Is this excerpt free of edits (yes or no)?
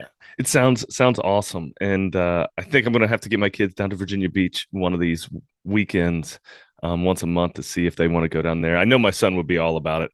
yes